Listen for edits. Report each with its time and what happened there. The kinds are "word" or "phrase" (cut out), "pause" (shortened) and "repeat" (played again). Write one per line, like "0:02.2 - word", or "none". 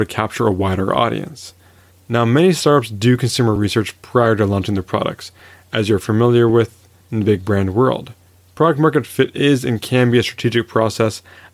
none

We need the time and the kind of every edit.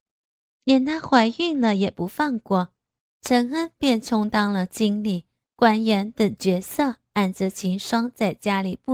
0:03.0 - pause
0:05.4 - phrase

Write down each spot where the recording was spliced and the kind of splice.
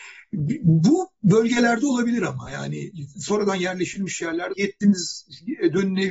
0:04.5 - word

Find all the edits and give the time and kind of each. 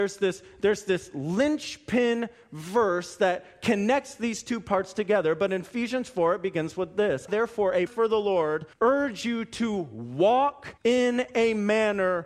0:07.3 - word
0:07.9 - word
0:08.7 - pause
0:10.8 - pause

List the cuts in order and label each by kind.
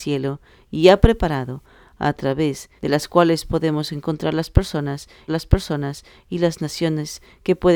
0:02.8 - pause
0:05.3 - repeat

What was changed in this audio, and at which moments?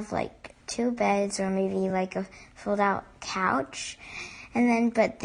none

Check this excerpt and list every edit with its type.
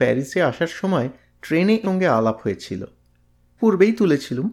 0:01.8 - word
0:03.6 - word

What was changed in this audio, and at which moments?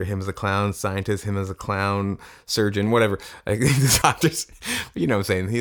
0:04.0 - phrase

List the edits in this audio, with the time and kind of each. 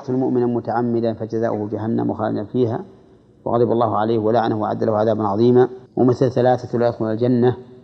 0:05.9 - pause

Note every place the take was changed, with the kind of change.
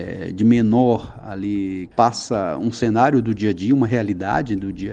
0:01.9 - phrase

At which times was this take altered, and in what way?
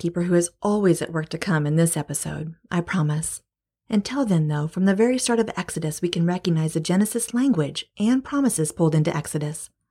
none

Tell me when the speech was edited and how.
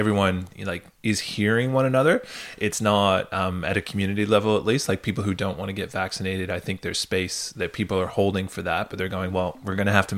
none

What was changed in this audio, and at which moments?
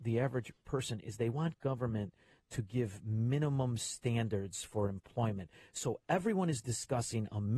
none

